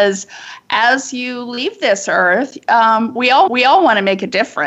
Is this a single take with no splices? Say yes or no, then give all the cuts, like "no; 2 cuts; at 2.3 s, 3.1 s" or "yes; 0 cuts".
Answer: no; 1 cut; at 3.5 s